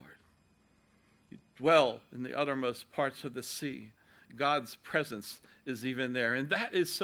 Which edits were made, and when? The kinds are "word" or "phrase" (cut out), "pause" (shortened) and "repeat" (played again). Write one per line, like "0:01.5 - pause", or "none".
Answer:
none

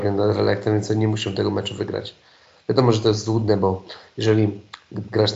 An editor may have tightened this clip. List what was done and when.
none

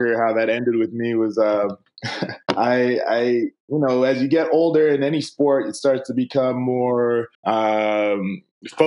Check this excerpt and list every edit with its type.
0:02.4 - pause
0:07.3 - pause

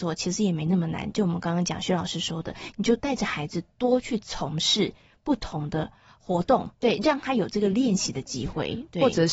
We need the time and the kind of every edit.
0:06.7 - pause

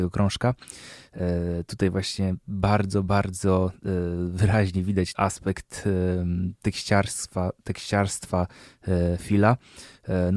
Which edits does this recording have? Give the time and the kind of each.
0:05.1 - phrase

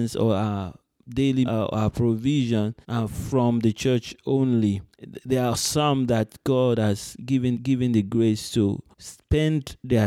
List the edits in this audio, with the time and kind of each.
0:01.4 - word
0:02.8 - pause
0:04.9 - pause
0:07.5 - repeat
0:08.9 - pause

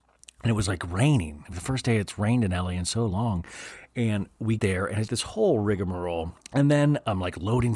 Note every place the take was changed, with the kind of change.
0:01.5 - word
0:04.6 - word
0:05.1 - word
0:06.4 - pause

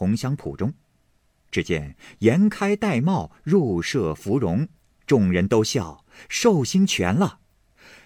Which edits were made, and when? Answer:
none

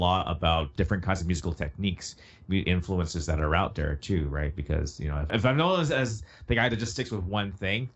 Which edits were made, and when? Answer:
0:02.6 - word

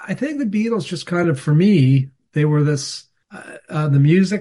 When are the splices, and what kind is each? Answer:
none

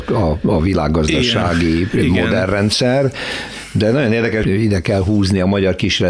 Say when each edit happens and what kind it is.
0:04.4 - word

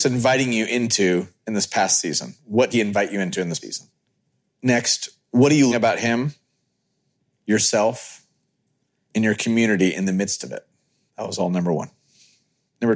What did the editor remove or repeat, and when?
0:02.7 - word
0:03.6 - word
0:05.7 - word

